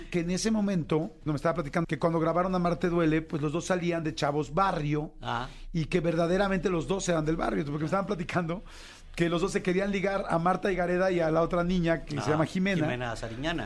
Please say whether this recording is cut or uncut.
cut